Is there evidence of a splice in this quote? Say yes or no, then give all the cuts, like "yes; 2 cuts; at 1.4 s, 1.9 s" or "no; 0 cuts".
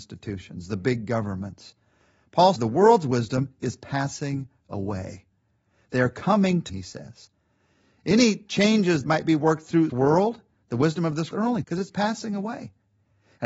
yes; 6 cuts; at 2.6 s, 6.7 s, 9.0 s, 9.9 s, 11.3 s, 11.6 s